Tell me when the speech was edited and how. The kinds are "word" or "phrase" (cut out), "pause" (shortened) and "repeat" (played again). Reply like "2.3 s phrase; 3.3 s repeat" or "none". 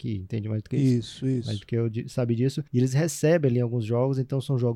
2.7 s pause